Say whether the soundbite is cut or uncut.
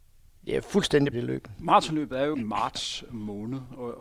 cut